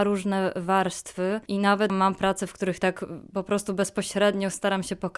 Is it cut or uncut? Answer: uncut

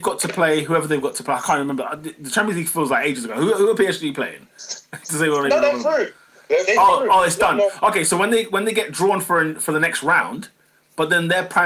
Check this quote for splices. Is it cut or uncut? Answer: uncut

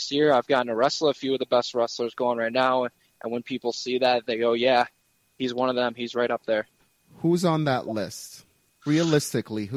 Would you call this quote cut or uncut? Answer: uncut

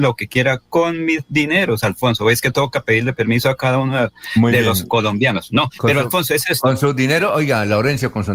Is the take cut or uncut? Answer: uncut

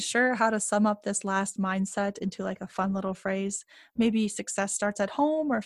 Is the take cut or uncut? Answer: uncut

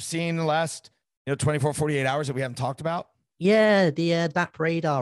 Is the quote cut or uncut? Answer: uncut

